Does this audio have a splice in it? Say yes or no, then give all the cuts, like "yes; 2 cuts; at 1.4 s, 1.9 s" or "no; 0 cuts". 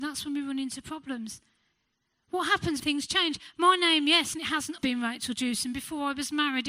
yes; 4 cuts; at 1.7 s, 2.8 s, 4.3 s, 4.8 s